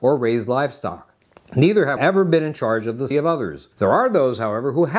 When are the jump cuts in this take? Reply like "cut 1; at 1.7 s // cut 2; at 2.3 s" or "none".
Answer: cut 1; at 1.2 s // cut 2; at 2.0 s // cut 3; at 3.1 s // cut 4; at 3.7 s